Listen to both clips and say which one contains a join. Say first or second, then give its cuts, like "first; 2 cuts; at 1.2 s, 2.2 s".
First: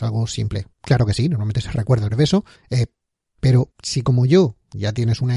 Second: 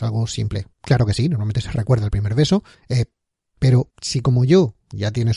first; 1 cut; at 2.1 s